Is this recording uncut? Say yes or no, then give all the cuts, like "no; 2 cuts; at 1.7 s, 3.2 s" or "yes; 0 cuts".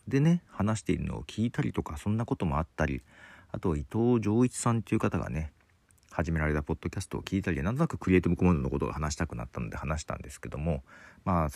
yes; 0 cuts